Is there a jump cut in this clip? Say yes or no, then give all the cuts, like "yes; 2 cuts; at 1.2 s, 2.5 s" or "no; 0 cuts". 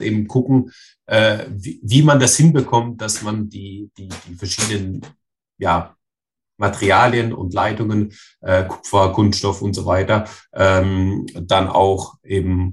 no; 0 cuts